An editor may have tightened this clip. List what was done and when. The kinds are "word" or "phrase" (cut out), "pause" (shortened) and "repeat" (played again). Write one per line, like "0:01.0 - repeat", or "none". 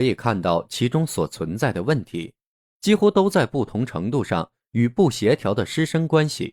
none